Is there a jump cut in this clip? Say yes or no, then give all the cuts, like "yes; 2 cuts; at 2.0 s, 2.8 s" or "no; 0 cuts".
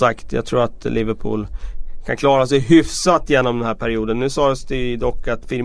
no; 0 cuts